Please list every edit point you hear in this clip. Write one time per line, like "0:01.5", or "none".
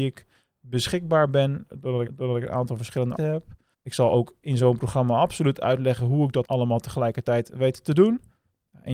0:02.1
0:03.2
0:03.7
0:06.4